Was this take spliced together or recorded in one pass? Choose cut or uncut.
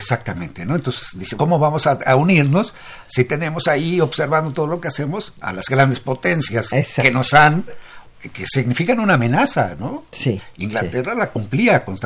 cut